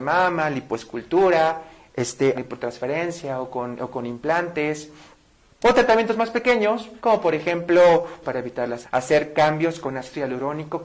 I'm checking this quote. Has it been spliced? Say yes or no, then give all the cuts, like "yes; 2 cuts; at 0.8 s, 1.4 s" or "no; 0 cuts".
yes; 5 cuts; at 2.3 s, 5.6 s, 7.0 s, 8.2 s, 8.8 s